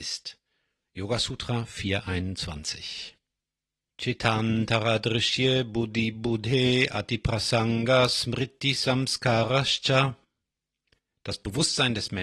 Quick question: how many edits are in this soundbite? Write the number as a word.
zero